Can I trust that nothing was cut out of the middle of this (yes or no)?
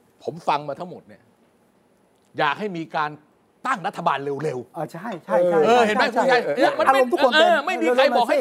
yes